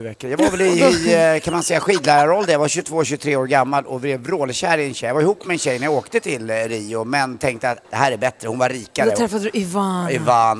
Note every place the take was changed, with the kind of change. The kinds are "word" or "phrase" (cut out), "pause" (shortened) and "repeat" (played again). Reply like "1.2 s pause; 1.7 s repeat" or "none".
7.8 s word